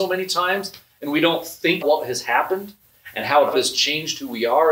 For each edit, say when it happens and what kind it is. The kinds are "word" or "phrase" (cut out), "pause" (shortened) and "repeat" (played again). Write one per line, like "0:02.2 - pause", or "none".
0:01.8 - word
0:03.5 - phrase